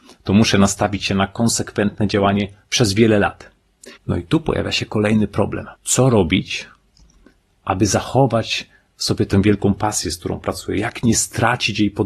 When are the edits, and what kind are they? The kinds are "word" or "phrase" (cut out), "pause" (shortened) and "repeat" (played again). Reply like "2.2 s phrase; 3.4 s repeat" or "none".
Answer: 4.0 s pause; 5.7 s pause